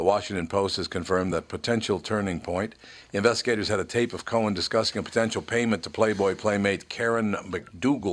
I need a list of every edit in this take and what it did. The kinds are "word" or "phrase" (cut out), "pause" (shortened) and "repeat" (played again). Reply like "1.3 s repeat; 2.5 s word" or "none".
none